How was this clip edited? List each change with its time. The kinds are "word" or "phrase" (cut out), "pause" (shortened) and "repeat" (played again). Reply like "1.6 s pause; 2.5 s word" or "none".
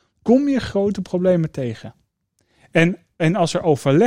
none